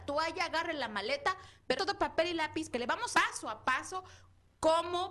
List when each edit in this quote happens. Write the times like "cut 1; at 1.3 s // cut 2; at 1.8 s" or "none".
cut 1; at 1.8 s // cut 2; at 2.7 s // cut 3; at 3.1 s